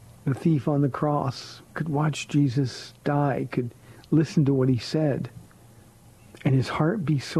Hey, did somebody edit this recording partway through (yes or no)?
yes